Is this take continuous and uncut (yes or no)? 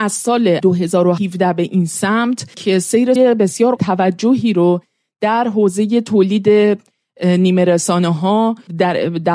no